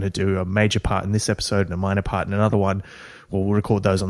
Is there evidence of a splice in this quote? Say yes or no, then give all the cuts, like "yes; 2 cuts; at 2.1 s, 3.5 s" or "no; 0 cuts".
no; 0 cuts